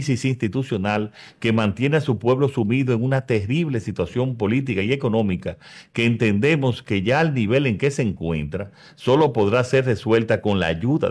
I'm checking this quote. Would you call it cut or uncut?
uncut